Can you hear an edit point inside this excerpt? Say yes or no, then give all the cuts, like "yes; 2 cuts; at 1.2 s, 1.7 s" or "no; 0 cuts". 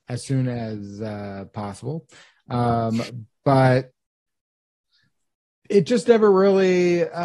no; 0 cuts